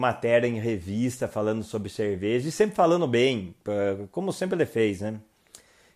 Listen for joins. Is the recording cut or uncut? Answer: uncut